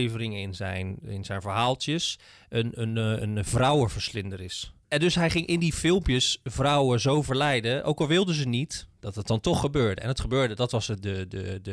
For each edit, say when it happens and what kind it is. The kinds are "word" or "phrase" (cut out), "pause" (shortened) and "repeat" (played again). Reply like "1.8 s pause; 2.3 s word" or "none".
8.9 s pause